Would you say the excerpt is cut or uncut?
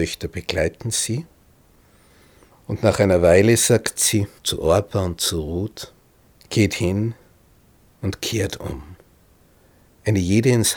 cut